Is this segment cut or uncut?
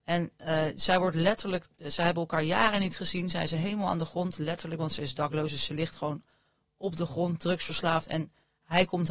uncut